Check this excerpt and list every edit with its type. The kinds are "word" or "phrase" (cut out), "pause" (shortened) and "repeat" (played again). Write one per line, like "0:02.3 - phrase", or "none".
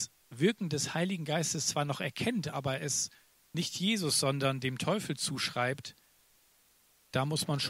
none